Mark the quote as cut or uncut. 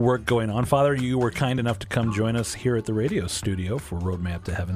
uncut